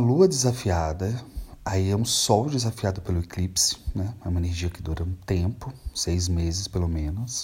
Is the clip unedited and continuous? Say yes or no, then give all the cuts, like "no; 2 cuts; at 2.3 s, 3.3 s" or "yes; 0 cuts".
yes; 0 cuts